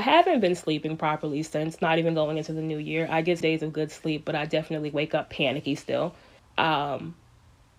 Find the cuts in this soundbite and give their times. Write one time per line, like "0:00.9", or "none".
0:03.4
0:06.4